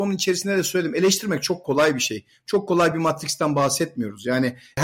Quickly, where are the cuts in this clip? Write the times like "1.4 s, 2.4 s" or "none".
none